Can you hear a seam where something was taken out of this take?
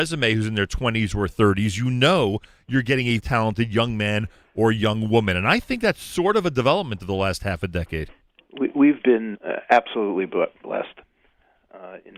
yes; 2 cuts; at 3.2 s, 9.3 s

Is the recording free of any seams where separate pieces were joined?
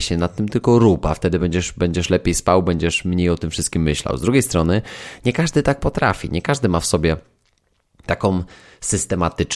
yes; 0 cuts

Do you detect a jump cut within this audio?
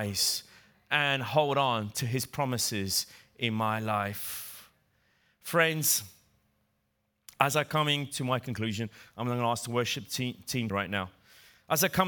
yes; 1 cut; at 10.7 s

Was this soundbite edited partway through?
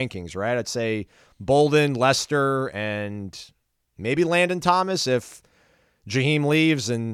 no; 0 cuts

